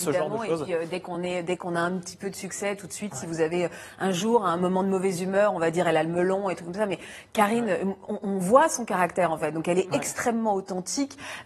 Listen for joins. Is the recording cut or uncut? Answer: uncut